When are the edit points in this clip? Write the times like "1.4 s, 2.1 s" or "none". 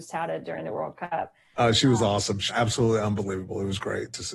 2.5 s